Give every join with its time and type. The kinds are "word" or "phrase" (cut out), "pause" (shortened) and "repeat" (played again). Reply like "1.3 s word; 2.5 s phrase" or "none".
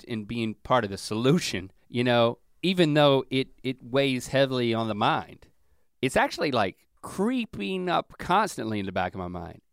1.8 s pause; 6.9 s pause